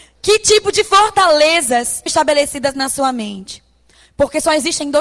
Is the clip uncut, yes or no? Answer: no